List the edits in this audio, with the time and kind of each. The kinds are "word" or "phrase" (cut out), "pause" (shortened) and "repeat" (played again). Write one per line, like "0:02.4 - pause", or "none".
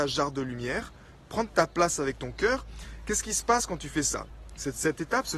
none